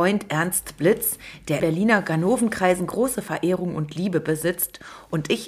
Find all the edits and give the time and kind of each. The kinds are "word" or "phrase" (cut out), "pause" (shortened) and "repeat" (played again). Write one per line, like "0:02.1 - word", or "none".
0:01.6 - word

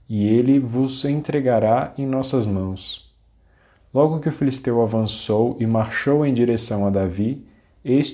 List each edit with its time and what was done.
none

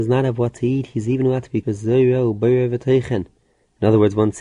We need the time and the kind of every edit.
0:01.6 - phrase

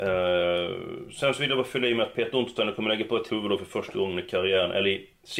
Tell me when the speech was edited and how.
0:03.3 - word

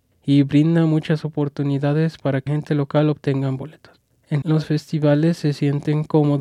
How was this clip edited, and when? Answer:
0:02.5 - word
0:04.4 - word

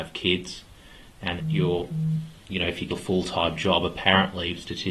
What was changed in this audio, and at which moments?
0:01.4 - word
0:02.9 - word

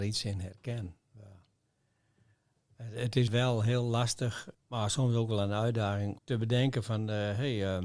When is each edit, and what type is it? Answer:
0:03.3 - word
0:04.5 - word
0:06.2 - word

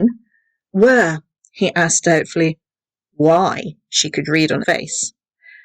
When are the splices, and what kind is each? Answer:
0:04.6 - word

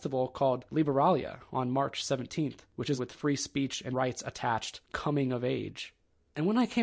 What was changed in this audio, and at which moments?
0:03.0 - word
0:03.9 - word
0:04.9 - word

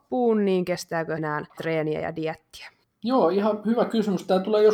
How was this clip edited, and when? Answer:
0:01.2 - word
0:01.6 - word
0:02.8 - pause

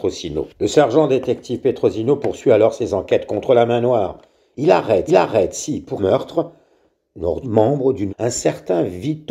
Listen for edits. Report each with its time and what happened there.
0:05.1 - repeat
0:06.0 - word
0:07.4 - phrase
0:08.1 - word

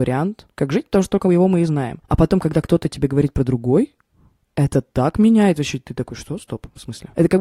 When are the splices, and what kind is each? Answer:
none

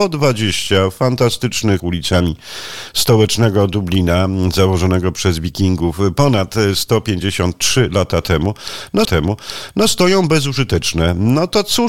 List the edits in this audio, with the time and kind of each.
0:01.8 - phrase
0:09.0 - repeat

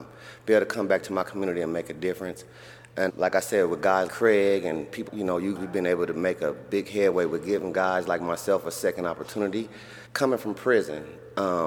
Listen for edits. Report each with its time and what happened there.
0:03.1 - word
0:04.1 - word
0:05.1 - word
0:05.6 - word
0:10.1 - pause

